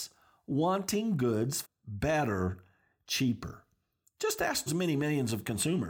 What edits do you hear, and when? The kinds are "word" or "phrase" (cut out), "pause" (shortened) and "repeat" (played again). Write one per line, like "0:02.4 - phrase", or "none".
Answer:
0:01.6 - word
0:04.7 - word